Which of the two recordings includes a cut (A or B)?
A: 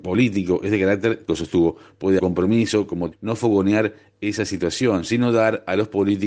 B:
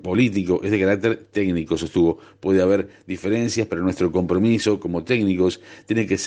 A